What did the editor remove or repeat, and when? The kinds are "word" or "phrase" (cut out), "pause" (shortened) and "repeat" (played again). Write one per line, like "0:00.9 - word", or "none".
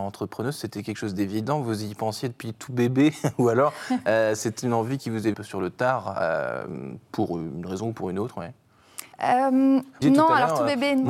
0:05.3 - phrase
0:09.1 - pause
0:10.0 - word